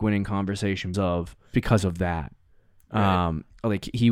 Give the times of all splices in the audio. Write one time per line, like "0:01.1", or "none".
0:00.9
0:01.5